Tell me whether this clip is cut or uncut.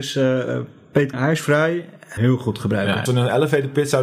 cut